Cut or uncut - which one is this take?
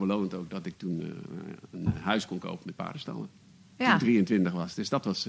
uncut